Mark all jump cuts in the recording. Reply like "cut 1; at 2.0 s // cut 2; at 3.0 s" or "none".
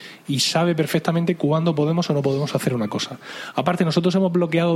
none